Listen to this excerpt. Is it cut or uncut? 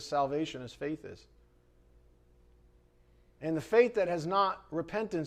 uncut